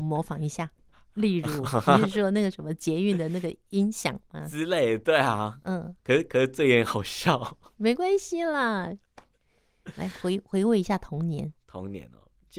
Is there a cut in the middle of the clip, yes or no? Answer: yes